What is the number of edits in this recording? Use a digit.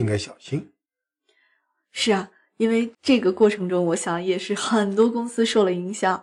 1